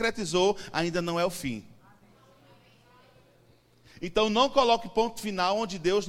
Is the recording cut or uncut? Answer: uncut